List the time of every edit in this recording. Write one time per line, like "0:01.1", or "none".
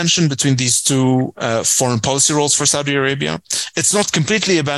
none